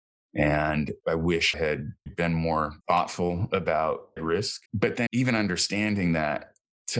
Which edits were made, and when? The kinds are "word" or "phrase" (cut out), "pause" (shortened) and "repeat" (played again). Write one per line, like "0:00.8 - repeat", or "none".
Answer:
0:01.0 - word
0:01.5 - word
0:02.1 - word
0:02.8 - pause
0:04.2 - phrase
0:04.7 - pause
0:05.1 - word